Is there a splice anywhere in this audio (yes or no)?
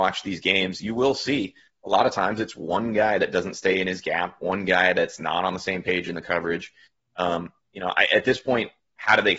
no